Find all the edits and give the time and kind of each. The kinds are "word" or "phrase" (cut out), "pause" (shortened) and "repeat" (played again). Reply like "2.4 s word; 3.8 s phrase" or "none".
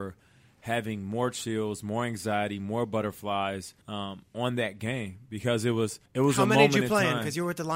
3.8 s pause; 6.1 s pause